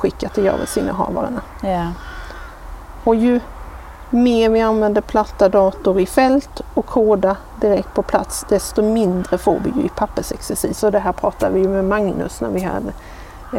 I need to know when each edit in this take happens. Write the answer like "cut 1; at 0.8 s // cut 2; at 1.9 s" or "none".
none